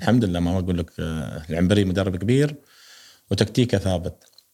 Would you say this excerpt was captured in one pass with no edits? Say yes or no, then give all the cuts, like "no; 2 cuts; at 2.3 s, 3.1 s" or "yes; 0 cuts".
yes; 0 cuts